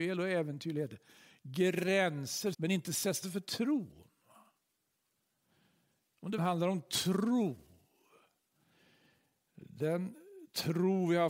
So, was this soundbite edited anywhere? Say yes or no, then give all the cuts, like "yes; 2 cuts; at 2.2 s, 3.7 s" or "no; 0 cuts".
yes; 3 cuts; at 2.5 s, 3.2 s, 6.4 s